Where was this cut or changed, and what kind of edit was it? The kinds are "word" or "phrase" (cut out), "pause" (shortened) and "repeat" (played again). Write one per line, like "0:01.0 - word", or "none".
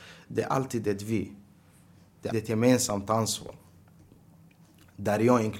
0:02.3 - word